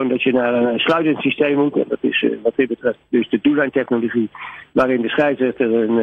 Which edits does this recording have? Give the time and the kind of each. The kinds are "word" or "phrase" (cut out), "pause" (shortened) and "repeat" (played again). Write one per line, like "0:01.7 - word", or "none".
none